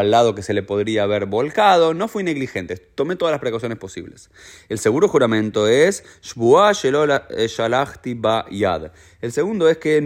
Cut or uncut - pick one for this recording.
uncut